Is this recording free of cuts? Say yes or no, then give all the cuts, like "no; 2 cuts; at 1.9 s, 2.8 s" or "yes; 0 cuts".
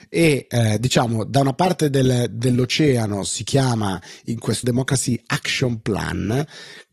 no; 1 cut; at 4.6 s